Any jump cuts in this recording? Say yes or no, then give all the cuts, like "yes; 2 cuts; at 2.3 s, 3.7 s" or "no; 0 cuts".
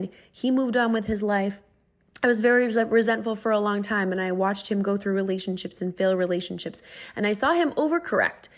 no; 0 cuts